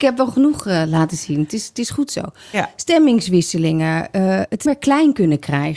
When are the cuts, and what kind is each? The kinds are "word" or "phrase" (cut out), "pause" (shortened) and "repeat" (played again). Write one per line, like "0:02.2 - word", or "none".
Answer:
0:04.7 - word